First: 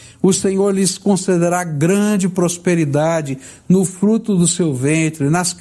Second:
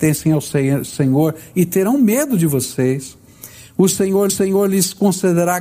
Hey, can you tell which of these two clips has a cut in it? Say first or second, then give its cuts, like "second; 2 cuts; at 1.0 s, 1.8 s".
second; 1 cut; at 4.3 s